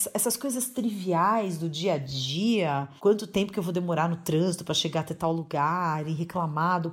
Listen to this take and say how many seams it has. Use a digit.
1